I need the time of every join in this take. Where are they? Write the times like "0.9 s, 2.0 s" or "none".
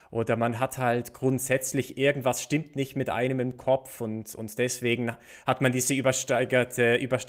none